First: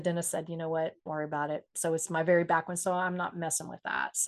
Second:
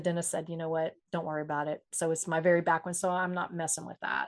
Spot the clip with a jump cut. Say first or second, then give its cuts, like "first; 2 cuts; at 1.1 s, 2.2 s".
first; 1 cut; at 1.1 s